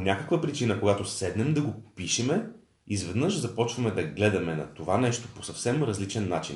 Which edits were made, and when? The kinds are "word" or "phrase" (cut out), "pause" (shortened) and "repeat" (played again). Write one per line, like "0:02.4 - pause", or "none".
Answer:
none